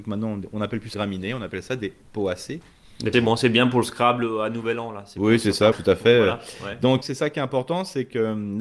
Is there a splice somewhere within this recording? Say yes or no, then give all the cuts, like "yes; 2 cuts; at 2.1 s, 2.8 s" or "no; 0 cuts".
yes; 4 cuts; at 0.9 s, 3.1 s, 5.7 s, 7.0 s